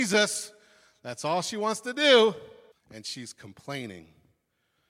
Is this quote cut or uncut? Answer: cut